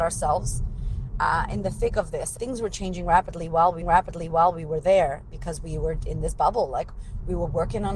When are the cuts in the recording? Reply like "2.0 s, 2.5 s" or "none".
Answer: 2.4 s, 3.8 s, 6.0 s